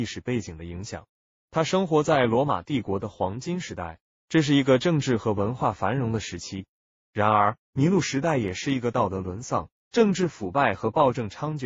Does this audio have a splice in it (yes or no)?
no